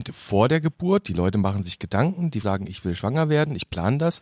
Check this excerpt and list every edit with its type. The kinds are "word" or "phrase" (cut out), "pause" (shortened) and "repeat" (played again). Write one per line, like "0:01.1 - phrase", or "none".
0:02.4 - word